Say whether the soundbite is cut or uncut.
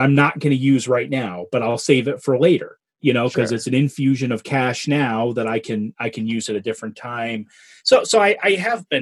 uncut